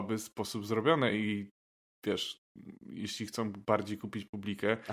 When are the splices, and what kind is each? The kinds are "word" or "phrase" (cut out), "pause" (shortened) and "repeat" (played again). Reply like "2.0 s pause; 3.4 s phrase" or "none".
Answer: none